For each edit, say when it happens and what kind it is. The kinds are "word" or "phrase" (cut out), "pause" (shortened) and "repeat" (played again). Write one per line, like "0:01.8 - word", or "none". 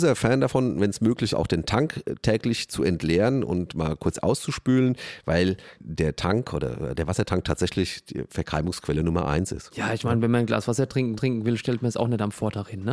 0:01.3 - word
0:05.8 - word
0:11.2 - repeat